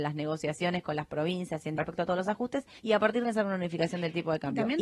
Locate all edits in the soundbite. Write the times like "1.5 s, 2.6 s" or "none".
1.8 s, 2.8 s, 3.2 s